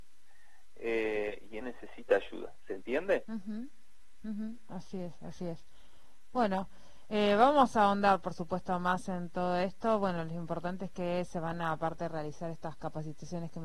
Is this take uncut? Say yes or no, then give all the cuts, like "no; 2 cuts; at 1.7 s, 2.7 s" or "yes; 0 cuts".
no; 1 cut; at 1.6 s